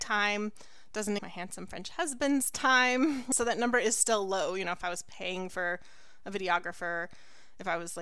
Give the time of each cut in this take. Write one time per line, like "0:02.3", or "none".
0:01.2